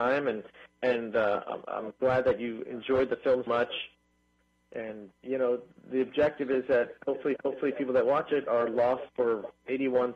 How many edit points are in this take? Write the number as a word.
three